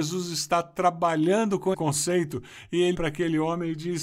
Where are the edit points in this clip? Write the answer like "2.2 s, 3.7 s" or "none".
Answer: 1.7 s, 2.9 s